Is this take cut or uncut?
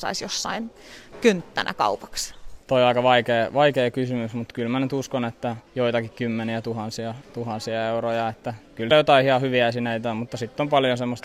cut